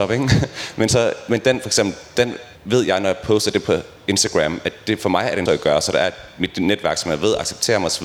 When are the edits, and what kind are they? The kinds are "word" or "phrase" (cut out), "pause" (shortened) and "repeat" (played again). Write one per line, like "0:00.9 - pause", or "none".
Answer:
0:02.6 - pause
0:05.5 - phrase

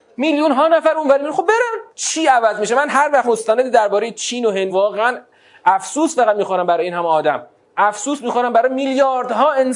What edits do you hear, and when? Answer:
0:01.9 - pause
0:03.2 - word
0:04.7 - word
0:07.6 - pause

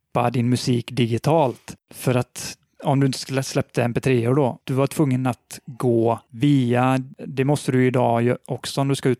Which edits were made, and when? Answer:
none

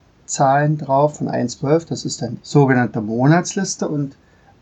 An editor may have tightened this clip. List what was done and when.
0:01.1 - word
0:01.6 - word
0:02.4 - word

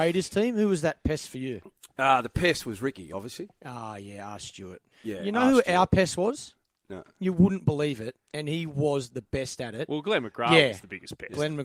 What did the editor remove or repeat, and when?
0:01.9 - pause
0:04.9 - pause

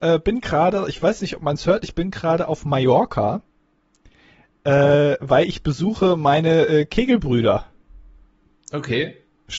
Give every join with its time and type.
none

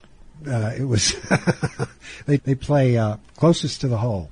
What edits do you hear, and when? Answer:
0:02.4 - word

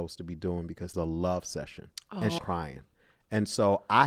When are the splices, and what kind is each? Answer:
0:00.9 - phrase
0:02.0 - pause
0:02.4 - word

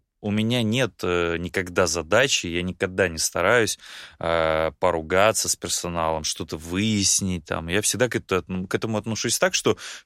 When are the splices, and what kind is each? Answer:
0:08.7 - word

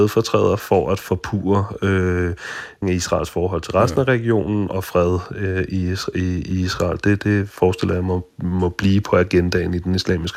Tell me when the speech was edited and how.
0:02.8 - word

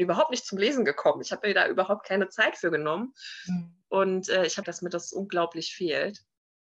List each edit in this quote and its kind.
0:03.8 - pause
0:04.6 - phrase

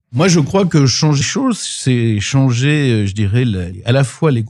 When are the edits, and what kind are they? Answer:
0:01.2 - word

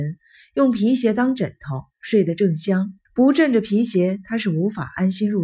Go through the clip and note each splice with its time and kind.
0:03.1 - pause

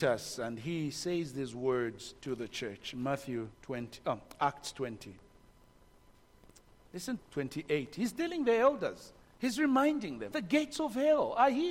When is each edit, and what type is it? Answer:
0:02.2 - pause
0:03.5 - pause
0:07.2 - phrase
0:09.2 - pause
0:10.3 - word

